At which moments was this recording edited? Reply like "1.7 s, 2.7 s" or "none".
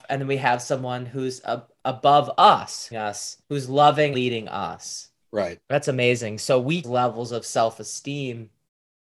2.9 s, 3.4 s, 4.1 s, 5.6 s, 6.8 s